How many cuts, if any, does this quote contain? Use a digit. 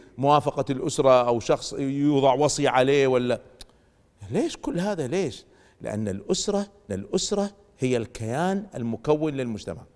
1